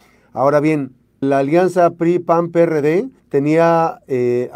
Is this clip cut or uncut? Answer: cut